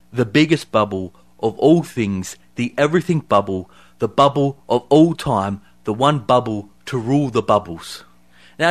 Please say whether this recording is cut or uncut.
uncut